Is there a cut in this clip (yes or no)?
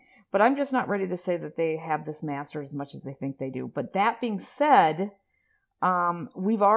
no